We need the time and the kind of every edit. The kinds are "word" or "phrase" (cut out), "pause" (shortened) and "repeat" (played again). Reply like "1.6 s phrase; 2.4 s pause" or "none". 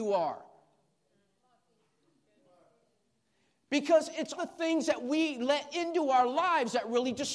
4.4 s word